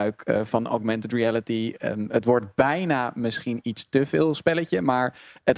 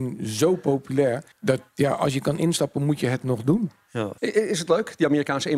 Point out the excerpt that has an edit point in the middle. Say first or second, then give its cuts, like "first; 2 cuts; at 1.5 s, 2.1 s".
second; 2 cuts; at 1.3 s, 4.2 s